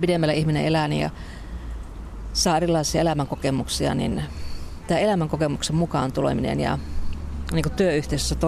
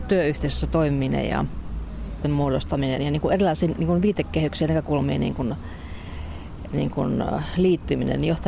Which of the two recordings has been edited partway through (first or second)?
second